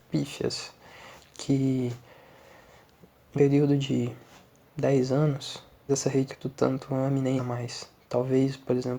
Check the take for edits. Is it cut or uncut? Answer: cut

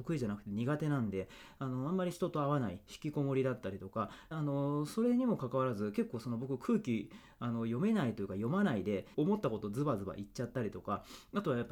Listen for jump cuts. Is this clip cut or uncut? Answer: cut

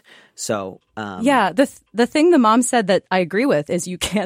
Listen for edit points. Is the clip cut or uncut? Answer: uncut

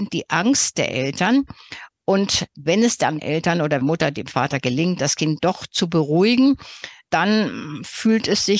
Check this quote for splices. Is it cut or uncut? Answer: cut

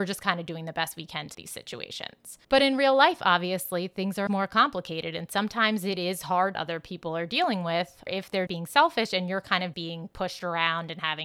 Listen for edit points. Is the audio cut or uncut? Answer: cut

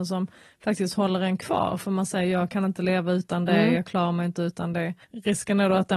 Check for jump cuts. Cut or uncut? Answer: cut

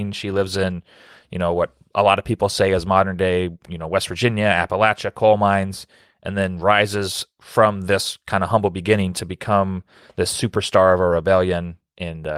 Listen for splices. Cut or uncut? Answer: uncut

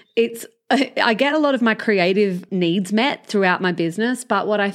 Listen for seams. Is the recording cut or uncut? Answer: uncut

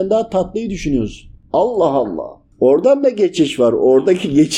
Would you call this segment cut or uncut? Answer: uncut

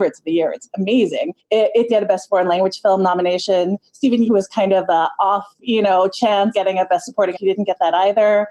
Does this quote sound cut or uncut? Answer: cut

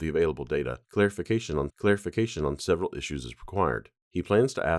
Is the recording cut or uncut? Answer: cut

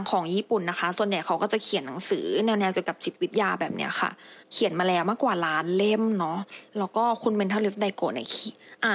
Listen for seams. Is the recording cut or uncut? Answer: cut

